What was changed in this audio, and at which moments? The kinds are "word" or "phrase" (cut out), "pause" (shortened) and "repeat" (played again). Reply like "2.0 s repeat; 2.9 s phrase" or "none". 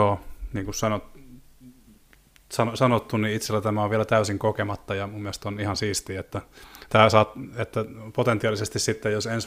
none